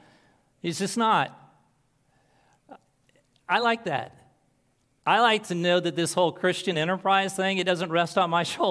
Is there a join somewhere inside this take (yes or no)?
no